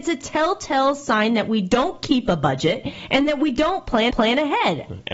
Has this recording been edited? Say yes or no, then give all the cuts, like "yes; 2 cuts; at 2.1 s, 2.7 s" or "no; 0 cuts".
yes; 1 cut; at 4.1 s